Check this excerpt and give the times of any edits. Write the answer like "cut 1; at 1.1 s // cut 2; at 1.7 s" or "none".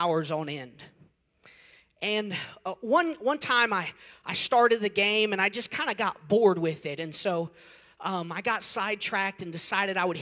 none

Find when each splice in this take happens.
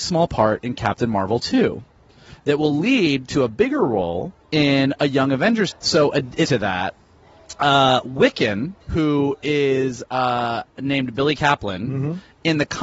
cut 1; at 4.4 s // cut 2; at 5.7 s // cut 3; at 6.4 s // cut 4; at 8.8 s

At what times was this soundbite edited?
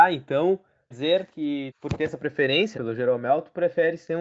cut 1; at 0.9 s // cut 2; at 1.7 s // cut 3; at 2.7 s

